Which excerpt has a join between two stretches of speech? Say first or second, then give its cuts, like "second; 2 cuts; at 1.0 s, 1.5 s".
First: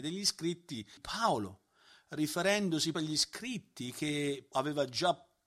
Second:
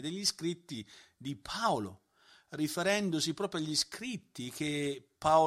first; 3 cuts; at 1.0 s, 2.9 s, 4.5 s